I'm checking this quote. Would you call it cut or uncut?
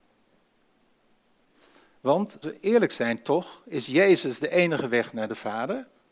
cut